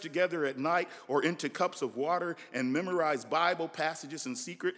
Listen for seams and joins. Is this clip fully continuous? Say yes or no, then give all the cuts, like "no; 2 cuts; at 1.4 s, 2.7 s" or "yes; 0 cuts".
yes; 0 cuts